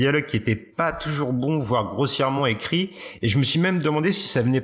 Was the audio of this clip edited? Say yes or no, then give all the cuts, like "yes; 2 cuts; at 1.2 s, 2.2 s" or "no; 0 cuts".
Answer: no; 0 cuts